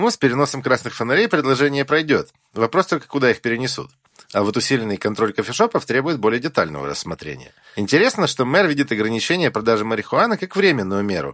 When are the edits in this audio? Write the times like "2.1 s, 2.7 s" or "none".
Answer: none